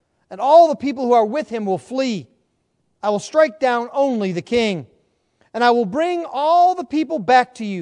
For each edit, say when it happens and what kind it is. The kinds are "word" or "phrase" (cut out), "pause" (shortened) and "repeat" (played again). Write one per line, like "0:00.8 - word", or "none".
none